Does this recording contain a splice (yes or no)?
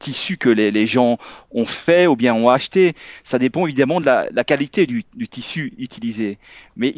no